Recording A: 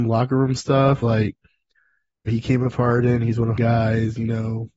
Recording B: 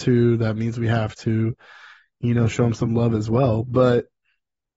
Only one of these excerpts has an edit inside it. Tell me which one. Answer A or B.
A